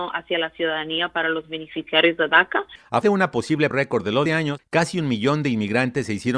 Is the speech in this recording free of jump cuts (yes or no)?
no